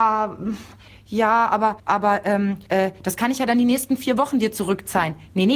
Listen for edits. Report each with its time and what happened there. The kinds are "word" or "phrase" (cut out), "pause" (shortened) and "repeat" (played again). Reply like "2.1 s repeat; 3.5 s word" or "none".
1.8 s pause; 2.7 s pause

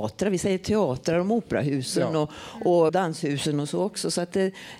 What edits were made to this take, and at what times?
2.9 s word

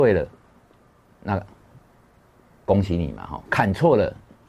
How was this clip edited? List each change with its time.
3.5 s word

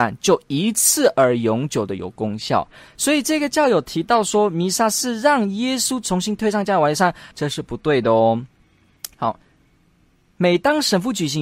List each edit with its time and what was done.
7.3 s pause

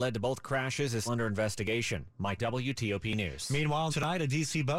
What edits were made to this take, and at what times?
1.1 s word; 2.4 s word; 3.9 s word

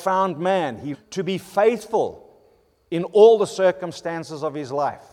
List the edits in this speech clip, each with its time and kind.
0.9 s word

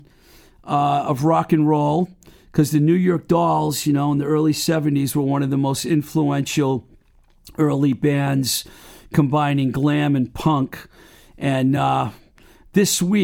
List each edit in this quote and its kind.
none

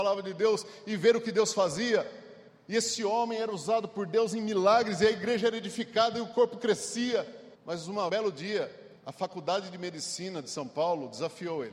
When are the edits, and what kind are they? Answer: 2.5 s pause; 7.5 s pause; 8.1 s word; 9.0 s pause

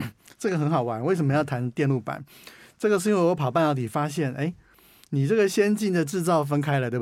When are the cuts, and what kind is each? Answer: none

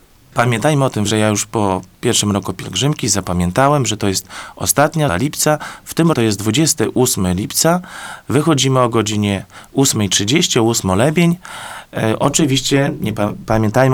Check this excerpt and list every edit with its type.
1.1 s word; 5.1 s word; 6.1 s word; 10.8 s word

